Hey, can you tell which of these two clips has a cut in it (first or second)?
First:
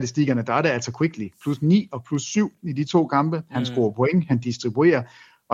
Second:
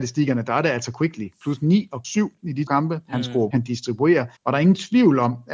second